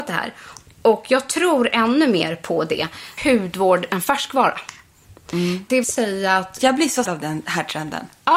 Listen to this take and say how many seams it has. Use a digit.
4